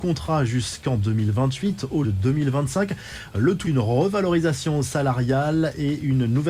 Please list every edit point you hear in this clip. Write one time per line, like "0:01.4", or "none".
0:02.0
0:03.6